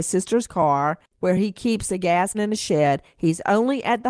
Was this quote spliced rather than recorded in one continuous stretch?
yes; 2 cuts; at 1.1 s, 2.3 s

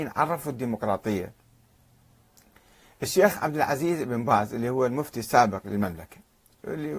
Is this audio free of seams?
yes; 0 cuts

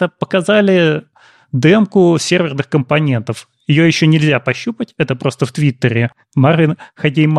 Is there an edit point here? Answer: no; 0 cuts

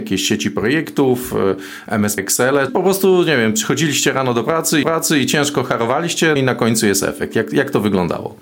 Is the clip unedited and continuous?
no; 4 cuts; at 2.2 s, 2.7 s, 4.8 s, 6.4 s

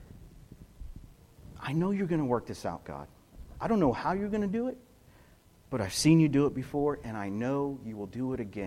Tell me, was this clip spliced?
no; 0 cuts

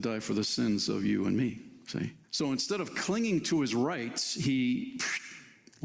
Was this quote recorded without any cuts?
no; 1 cut; at 2.2 s

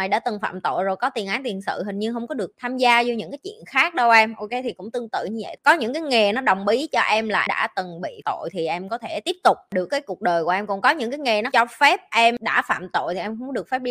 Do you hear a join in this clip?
yes; 4 cuts; at 7.5 s, 8.2 s, 9.9 s, 11.5 s

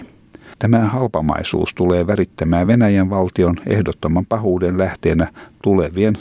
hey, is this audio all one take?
yes; 0 cuts

